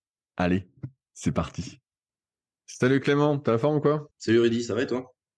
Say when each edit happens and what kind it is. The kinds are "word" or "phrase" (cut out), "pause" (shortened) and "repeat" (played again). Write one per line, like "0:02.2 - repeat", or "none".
0:02.1 - pause
0:04.1 - pause